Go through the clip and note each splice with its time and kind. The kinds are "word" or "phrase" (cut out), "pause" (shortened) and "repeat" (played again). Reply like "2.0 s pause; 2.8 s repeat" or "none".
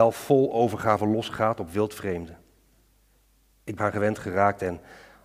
3.8 s phrase